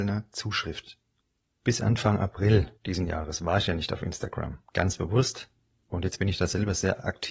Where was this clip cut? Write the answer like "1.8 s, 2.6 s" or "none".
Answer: 2.8 s